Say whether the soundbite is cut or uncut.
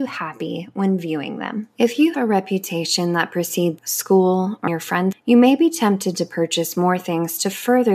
cut